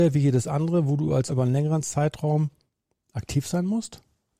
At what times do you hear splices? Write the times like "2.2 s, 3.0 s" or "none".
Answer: 1.3 s